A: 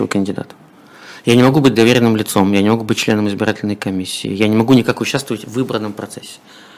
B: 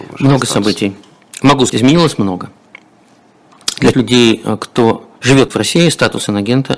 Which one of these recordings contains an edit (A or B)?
B